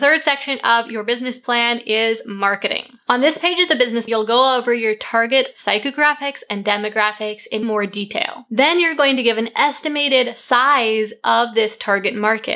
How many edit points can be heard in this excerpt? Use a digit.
3